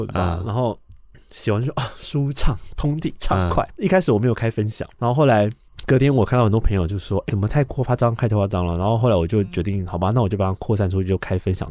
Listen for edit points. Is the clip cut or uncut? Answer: cut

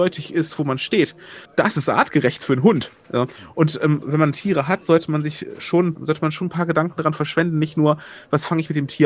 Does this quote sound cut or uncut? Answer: cut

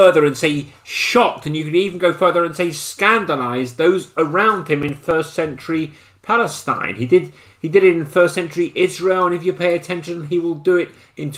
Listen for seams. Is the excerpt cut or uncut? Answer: uncut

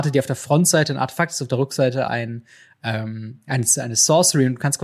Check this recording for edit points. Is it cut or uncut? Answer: uncut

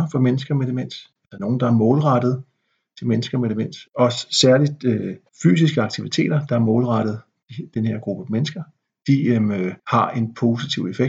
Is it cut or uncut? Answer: cut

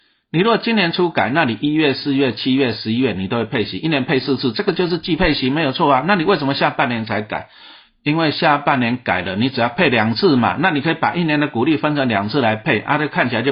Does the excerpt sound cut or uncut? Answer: uncut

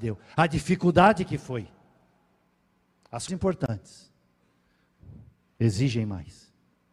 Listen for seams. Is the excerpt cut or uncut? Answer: cut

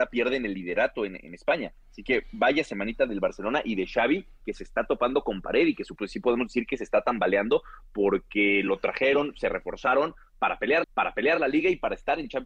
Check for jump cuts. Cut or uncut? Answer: cut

